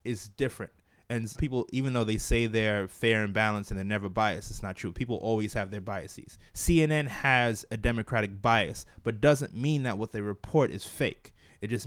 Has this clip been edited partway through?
yes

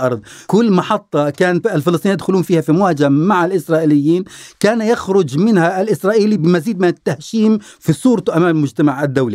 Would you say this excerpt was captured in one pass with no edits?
yes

